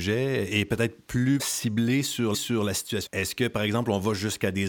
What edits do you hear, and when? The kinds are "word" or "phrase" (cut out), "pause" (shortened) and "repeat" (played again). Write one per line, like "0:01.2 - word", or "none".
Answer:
0:01.4 - word
0:02.3 - repeat
0:03.1 - word